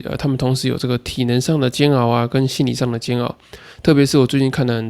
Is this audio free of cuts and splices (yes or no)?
yes